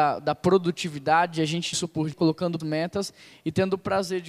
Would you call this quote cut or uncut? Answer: cut